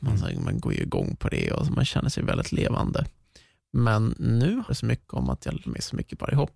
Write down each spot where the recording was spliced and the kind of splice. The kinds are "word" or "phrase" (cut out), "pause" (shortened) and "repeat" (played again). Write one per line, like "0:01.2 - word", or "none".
0:04.7 - word
0:05.7 - word